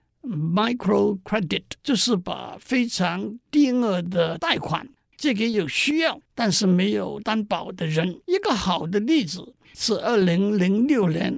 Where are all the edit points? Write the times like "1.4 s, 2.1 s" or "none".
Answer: 1.8 s, 6.3 s, 8.2 s